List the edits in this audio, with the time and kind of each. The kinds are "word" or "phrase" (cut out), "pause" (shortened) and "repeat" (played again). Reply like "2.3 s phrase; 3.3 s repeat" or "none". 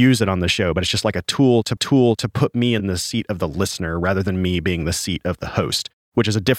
1.8 s repeat